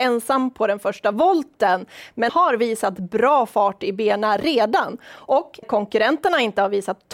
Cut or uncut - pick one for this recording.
cut